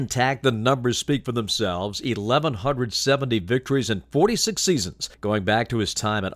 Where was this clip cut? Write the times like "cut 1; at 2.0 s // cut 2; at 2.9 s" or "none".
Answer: cut 1; at 5.1 s